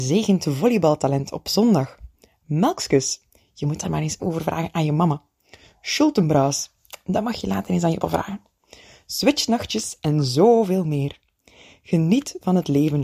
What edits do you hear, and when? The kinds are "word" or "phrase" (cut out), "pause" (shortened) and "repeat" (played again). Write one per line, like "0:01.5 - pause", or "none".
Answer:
0:03.8 - word
0:04.2 - word
0:08.0 - word